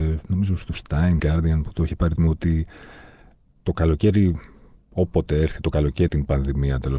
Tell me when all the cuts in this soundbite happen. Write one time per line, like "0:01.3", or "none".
0:01.2
0:02.2
0:06.1